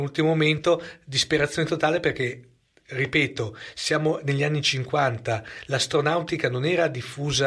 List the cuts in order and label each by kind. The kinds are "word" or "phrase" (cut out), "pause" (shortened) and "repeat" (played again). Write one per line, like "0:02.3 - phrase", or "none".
none